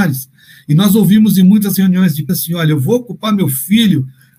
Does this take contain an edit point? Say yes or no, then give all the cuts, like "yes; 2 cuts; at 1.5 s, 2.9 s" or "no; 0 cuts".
yes; 1 cut; at 2.3 s